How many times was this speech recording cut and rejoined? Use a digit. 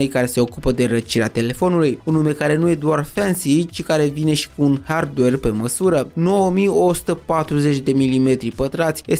0